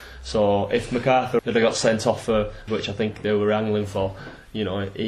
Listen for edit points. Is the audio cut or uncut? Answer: cut